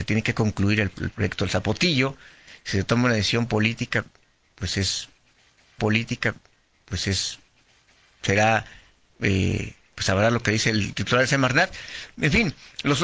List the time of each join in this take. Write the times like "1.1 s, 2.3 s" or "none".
5.8 s